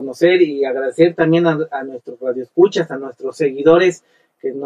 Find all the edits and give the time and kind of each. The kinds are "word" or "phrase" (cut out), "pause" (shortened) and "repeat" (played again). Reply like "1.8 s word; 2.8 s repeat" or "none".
none

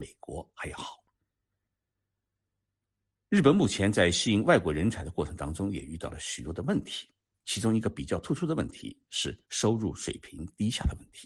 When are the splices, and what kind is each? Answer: 7.2 s pause; 9.4 s pause

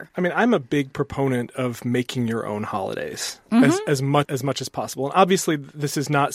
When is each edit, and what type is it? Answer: 4.2 s word

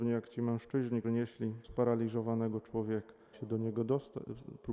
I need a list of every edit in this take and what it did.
1.0 s word; 1.6 s word; 3.3 s word

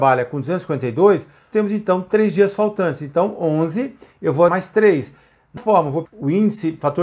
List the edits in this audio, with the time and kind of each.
1.5 s word; 4.5 s word; 5.6 s word; 6.1 s word

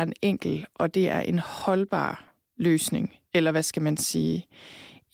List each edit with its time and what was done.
2.5 s pause

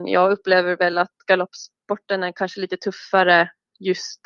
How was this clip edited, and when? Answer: none

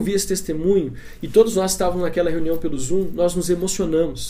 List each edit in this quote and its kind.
none

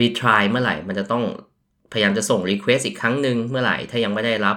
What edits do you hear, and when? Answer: none

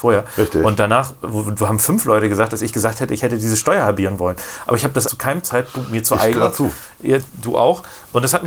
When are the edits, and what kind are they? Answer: 5.0 s word; 6.3 s word

